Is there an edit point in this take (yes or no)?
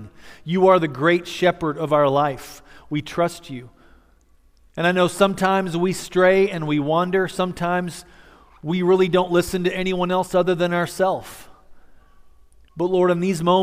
no